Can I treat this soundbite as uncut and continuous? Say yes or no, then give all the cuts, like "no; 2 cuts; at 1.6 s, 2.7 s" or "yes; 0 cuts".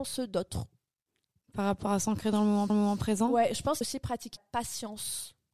no; 3 cuts; at 2.7 s, 3.8 s, 4.4 s